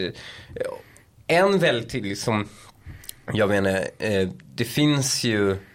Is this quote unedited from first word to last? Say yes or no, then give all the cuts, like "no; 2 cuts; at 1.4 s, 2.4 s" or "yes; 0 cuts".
yes; 0 cuts